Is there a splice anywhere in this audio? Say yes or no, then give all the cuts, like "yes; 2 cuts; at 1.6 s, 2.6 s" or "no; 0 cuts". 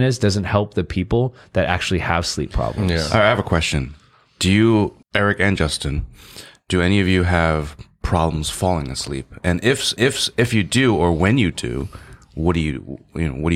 yes; 2 cuts; at 5.0 s, 10.0 s